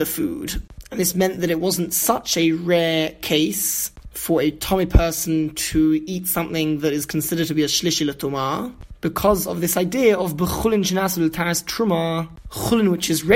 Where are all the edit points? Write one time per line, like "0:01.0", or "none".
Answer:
none